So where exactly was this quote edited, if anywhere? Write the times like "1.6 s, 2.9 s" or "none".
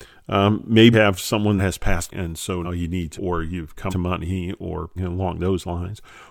0.9 s, 1.6 s, 2.1 s, 2.6 s, 3.1 s, 3.9 s, 5.0 s